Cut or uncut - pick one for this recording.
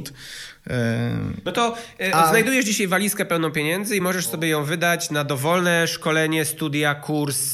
uncut